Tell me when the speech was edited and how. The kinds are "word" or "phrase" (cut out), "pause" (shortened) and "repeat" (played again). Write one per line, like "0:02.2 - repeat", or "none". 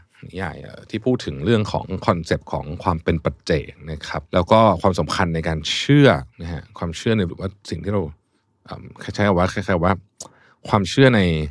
0:04.2 - pause
0:06.3 - word
0:07.3 - word